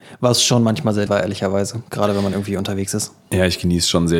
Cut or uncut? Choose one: cut